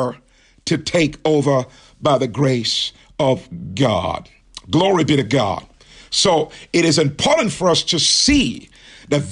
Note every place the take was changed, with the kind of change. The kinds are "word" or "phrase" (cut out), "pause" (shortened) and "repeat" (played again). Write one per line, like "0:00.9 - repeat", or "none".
none